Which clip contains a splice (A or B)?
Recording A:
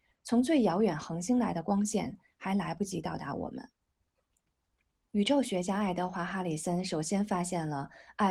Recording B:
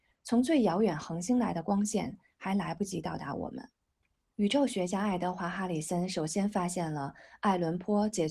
B